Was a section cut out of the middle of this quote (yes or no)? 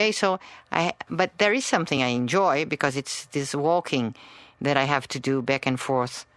no